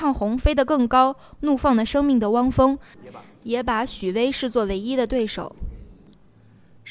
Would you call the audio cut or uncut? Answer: uncut